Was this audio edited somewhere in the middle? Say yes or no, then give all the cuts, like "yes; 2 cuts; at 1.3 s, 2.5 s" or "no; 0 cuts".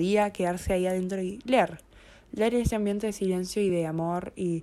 no; 0 cuts